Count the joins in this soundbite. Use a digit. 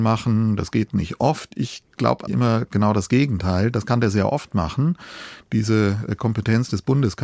1